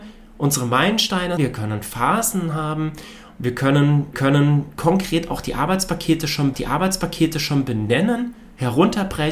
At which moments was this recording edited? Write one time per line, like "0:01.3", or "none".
0:01.4
0:04.1
0:06.5